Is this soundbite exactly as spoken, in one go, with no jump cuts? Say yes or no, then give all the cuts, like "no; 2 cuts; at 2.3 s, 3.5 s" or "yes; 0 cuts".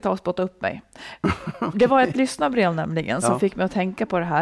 yes; 0 cuts